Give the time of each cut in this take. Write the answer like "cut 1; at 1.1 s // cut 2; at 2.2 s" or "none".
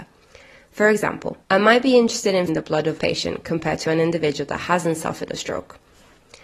cut 1; at 1.4 s // cut 2; at 2.5 s // cut 3; at 3.0 s